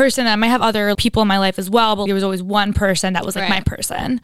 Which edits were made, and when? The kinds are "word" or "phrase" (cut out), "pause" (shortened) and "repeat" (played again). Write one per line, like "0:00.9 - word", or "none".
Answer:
0:00.9 - word
0:02.1 - word